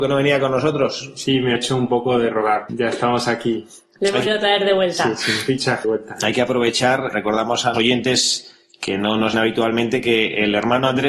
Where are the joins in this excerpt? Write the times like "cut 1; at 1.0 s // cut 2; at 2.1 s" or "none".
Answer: cut 1; at 1.6 s // cut 2; at 2.7 s // cut 3; at 4.3 s // cut 4; at 5.8 s // cut 5; at 7.1 s // cut 6; at 7.7 s // cut 7; at 9.3 s